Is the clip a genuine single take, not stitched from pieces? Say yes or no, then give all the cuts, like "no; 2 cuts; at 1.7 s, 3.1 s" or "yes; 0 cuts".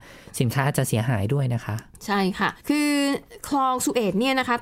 no; 1 cut; at 2.6 s